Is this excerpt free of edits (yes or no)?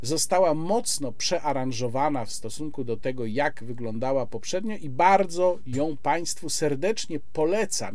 yes